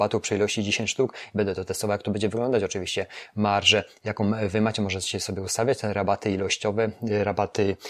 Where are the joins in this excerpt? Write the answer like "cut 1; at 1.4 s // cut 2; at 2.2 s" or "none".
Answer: none